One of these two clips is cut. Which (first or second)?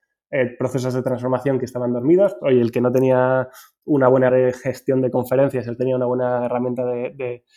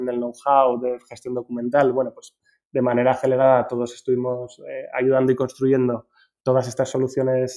first